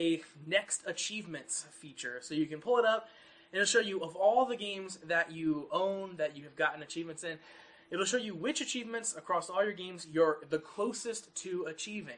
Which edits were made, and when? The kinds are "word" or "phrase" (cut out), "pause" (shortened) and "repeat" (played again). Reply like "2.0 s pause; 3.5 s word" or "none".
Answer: none